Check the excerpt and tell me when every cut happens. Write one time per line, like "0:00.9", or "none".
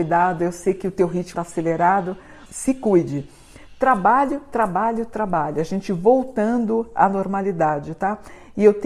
0:01.3
0:02.5